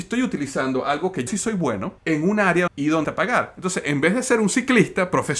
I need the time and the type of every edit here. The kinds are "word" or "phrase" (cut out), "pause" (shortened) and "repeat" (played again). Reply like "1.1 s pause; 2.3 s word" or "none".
1.3 s word; 2.0 s pause; 2.7 s phrase; 3.0 s phrase